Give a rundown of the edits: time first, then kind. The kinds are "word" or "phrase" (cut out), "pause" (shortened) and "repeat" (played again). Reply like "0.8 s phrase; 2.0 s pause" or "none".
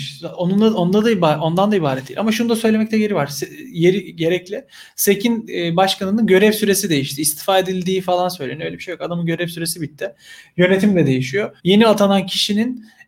11.6 s pause